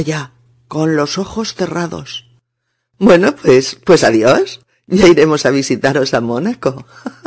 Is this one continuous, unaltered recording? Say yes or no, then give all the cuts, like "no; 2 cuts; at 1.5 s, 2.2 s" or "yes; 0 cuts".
yes; 0 cuts